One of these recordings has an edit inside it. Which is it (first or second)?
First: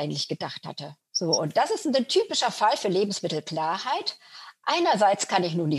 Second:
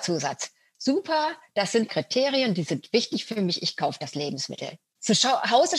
second